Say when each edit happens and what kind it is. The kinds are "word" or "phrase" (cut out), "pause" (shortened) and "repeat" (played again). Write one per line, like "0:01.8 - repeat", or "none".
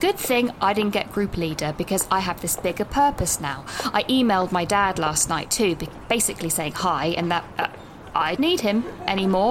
0:07.5 - word
0:08.4 - word